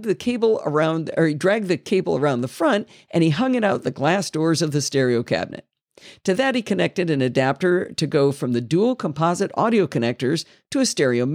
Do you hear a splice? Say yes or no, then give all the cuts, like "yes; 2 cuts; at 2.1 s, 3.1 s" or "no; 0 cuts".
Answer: no; 0 cuts